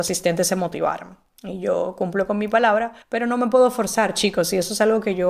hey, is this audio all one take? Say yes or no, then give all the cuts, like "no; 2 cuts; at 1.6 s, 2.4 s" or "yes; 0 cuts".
no; 1 cut; at 3.0 s